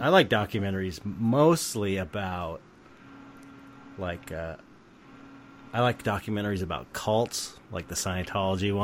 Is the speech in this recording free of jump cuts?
yes; 0 cuts

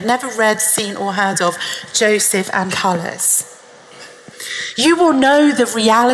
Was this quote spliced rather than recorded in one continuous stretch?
yes; 1 cut; at 2.7 s

